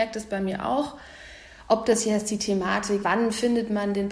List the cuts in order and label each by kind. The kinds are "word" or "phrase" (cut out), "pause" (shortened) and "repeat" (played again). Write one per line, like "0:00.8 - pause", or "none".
0:03.0 - word